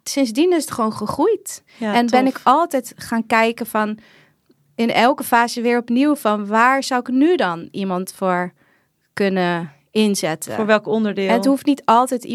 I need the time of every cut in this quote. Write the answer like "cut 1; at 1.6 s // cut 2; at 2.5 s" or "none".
none